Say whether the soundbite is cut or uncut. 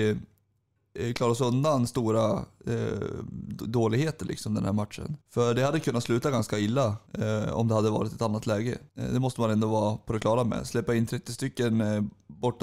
cut